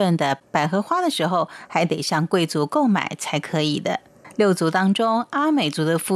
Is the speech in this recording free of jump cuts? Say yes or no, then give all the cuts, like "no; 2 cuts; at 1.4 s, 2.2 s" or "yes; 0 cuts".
yes; 0 cuts